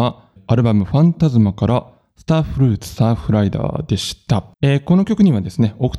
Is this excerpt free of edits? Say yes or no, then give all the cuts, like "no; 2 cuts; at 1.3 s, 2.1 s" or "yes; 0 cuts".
no; 1 cut; at 4.5 s